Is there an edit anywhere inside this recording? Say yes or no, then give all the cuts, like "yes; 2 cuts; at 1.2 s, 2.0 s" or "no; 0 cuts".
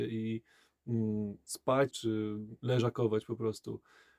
yes; 1 cut; at 1.9 s